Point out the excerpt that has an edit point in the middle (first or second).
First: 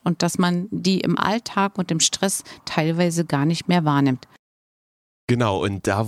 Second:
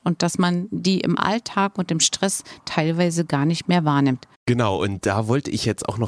second